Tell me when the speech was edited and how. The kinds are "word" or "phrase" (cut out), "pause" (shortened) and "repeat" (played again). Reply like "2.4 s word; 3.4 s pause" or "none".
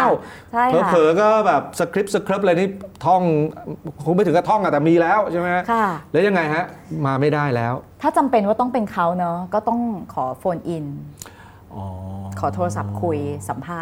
7.9 s pause